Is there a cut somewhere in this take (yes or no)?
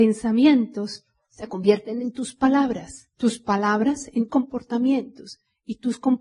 yes